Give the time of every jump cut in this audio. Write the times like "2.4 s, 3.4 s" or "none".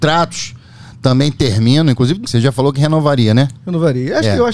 2.2 s